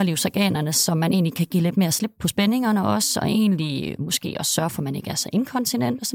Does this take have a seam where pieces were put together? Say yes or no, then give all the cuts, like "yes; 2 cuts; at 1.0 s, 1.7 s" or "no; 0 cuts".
no; 0 cuts